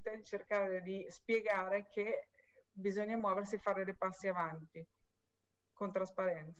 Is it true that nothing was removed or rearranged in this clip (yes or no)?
yes